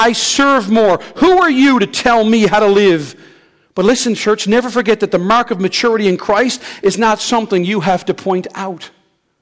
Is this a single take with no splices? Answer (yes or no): yes